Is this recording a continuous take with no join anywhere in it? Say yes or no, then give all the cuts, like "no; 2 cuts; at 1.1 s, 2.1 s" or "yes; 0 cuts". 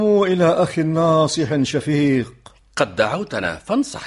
yes; 0 cuts